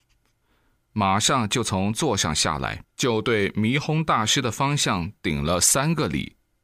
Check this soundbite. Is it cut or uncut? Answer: cut